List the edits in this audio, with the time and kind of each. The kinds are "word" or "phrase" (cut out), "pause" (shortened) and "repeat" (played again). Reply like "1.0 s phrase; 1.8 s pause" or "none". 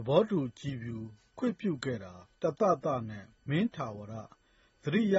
2.4 s pause; 3.4 s pause